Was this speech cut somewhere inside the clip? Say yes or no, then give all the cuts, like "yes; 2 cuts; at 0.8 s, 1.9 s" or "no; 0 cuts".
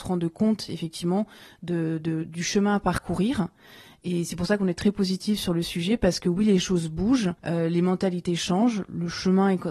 yes; 1 cut; at 7.4 s